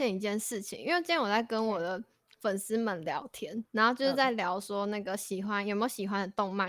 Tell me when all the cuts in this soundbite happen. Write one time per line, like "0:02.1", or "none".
0:03.7